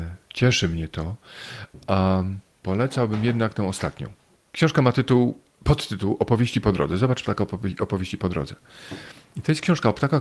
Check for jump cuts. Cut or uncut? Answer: cut